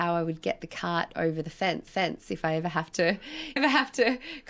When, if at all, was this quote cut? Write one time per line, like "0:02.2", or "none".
0:01.9
0:03.6